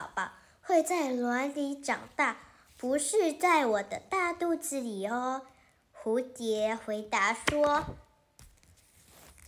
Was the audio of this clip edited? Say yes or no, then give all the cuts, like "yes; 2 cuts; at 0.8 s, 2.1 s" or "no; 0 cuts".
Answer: no; 0 cuts